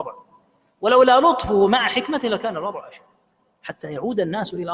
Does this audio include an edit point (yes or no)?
no